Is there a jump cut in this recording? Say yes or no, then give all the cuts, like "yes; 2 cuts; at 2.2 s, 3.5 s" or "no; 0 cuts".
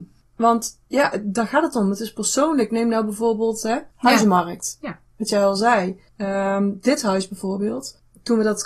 yes; 2 cuts; at 3.9 s, 6.1 s